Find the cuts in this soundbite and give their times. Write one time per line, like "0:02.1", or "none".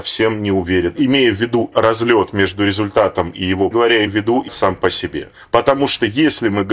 0:01.7
0:03.7
0:04.1
0:04.5